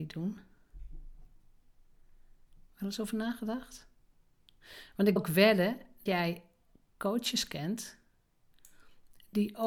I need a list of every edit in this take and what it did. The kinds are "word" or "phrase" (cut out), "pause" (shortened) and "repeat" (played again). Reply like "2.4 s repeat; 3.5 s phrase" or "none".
5.2 s word; 6.1 s word